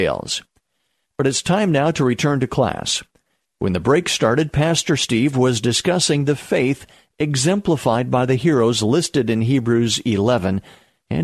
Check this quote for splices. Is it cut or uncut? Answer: uncut